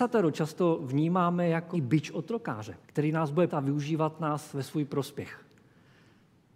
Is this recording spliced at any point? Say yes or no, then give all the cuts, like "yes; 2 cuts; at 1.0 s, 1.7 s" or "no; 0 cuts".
yes; 3 cuts; at 1.7 s, 2.8 s, 3.5 s